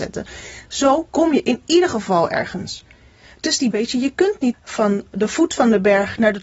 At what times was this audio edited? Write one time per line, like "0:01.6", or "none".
0:03.7
0:04.5